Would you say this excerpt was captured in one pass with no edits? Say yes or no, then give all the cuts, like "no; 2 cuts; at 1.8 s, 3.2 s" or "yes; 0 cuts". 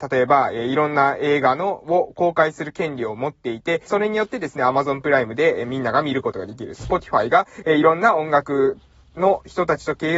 no; 1 cut; at 3.9 s